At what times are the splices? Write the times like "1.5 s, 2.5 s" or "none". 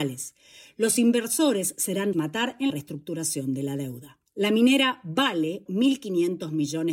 2.1 s, 2.7 s, 4.3 s, 5.7 s